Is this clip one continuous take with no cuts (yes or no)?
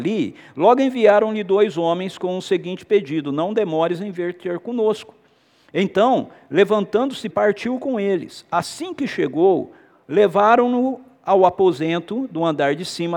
no